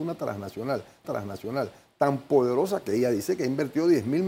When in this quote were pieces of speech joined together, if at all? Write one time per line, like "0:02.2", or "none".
0:01.0